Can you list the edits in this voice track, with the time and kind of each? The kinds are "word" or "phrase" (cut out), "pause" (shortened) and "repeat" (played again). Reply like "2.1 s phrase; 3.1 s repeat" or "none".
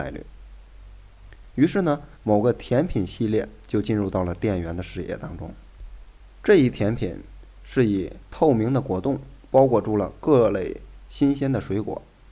2.1 s pause; 6.2 s pause